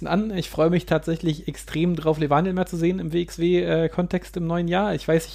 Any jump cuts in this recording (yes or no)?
no